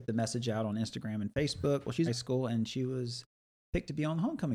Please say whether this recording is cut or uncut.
cut